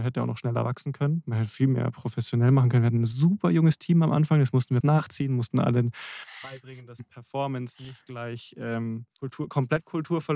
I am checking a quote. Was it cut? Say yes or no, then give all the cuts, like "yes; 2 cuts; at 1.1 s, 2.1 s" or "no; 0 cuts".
yes; 2 cuts; at 4.8 s, 9.1 s